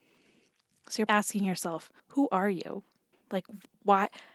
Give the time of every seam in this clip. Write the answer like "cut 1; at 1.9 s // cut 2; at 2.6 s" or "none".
cut 1; at 1.1 s // cut 2; at 2.0 s // cut 3; at 3.1 s